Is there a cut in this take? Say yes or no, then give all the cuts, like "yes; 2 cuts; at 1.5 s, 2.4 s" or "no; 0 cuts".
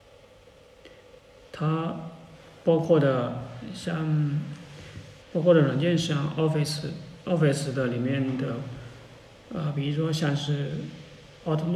yes; 1 cut; at 5.2 s